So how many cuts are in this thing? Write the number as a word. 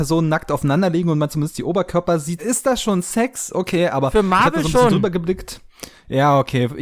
one